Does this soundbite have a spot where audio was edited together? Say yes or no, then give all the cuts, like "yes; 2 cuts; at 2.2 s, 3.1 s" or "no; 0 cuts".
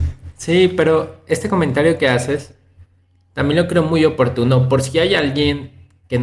no; 0 cuts